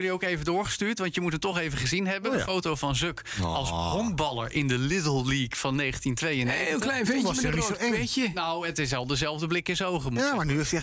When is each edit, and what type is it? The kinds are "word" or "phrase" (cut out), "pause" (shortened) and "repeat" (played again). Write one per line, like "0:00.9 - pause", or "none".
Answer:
none